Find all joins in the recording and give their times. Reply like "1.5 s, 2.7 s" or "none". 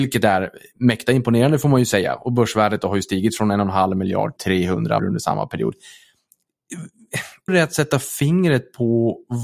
4.4 s, 5.0 s, 7.5 s